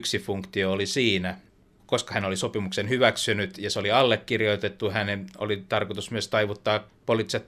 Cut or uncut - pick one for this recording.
uncut